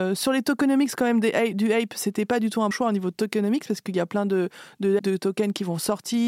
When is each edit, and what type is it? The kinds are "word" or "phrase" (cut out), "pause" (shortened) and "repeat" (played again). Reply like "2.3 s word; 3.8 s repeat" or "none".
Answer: 2.7 s word; 5.0 s phrase